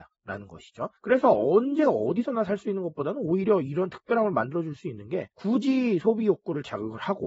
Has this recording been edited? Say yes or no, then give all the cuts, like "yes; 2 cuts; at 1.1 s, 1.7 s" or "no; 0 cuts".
yes; 2 cuts; at 1.0 s, 5.3 s